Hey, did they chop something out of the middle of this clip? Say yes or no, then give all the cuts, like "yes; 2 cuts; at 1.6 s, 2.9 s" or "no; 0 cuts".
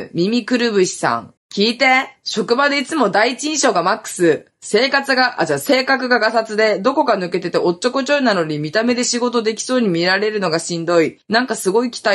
yes; 2 cuts; at 1.4 s, 11.2 s